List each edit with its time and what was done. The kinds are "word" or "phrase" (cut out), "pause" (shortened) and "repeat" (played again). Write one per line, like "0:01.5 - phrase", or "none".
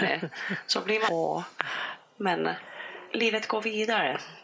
0:01.1 - word